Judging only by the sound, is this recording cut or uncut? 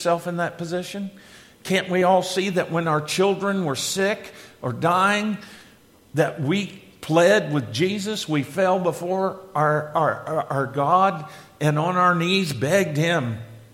uncut